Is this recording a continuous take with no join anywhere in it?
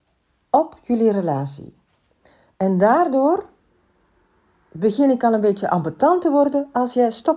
yes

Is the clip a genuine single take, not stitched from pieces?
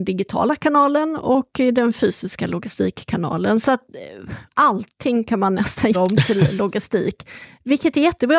no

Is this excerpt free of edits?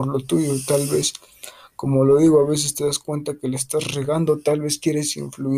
yes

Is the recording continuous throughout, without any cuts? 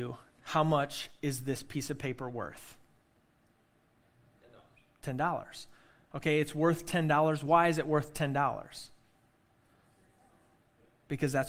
yes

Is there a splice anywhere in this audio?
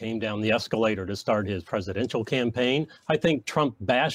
yes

